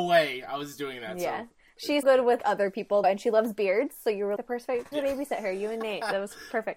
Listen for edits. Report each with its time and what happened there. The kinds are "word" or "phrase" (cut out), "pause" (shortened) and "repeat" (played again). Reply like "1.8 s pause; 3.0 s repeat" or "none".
2.0 s word; 2.4 s word; 3.0 s word; 4.4 s word; 4.9 s word

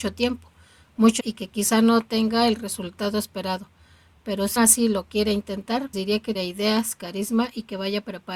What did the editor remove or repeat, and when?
1.2 s word; 4.6 s word; 5.9 s word; 6.3 s word

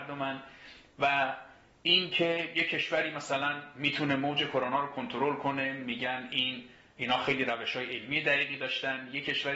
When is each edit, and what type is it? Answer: none

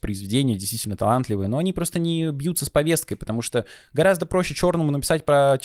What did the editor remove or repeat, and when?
none

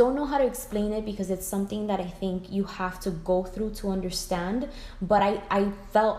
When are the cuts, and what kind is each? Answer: none

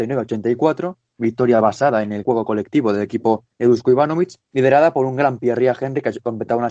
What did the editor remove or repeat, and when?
2.2 s word; 3.5 s pause; 4.4 s pause

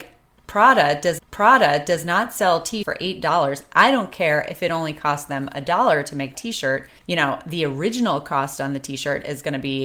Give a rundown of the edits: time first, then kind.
1.2 s repeat; 2.8 s word; 6.3 s word; 7.0 s pause

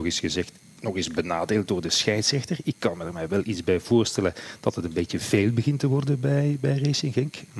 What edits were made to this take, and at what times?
none

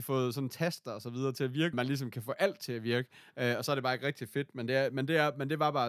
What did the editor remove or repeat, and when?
1.7 s phrase

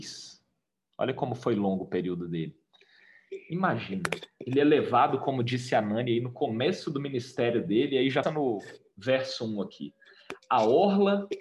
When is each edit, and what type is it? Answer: 8.2 s word

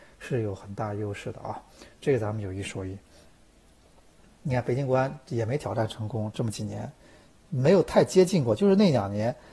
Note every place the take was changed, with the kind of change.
none

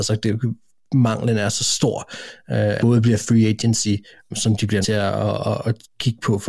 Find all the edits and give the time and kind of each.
2.8 s phrase; 4.3 s phrase; 4.8 s word

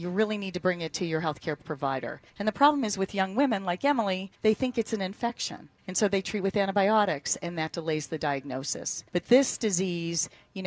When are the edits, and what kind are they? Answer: 2.3 s pause; 4.3 s pause; 5.8 s pause; 9.1 s pause

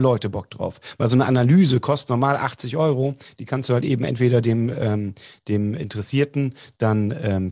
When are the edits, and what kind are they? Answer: none

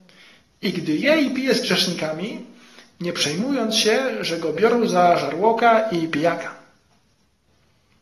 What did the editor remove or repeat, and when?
none

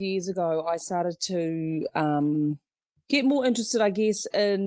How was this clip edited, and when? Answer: none

